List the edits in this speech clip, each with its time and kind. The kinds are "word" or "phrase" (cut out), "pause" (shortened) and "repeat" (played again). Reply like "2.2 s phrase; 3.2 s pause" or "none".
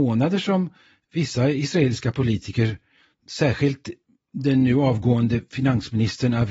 none